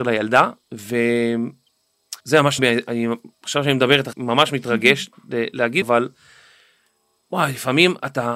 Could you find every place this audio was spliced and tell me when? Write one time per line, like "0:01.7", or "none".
0:02.2
0:02.6
0:04.1
0:05.8